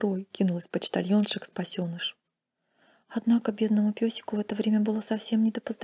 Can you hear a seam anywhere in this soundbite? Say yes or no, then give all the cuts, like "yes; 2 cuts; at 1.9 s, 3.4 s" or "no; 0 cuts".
no; 0 cuts